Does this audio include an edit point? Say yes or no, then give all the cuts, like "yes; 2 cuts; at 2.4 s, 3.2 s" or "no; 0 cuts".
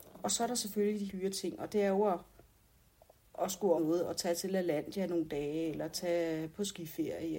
yes; 2 cuts; at 1.1 s, 3.8 s